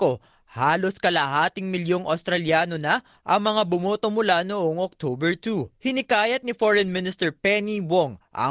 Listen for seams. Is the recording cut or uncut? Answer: cut